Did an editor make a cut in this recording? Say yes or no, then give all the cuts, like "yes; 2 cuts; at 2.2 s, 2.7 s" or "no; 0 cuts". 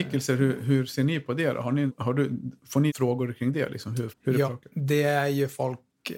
yes; 4 cuts; at 1.9 s, 2.9 s, 4.1 s, 4.4 s